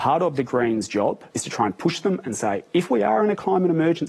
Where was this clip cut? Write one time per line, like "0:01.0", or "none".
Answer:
0:01.3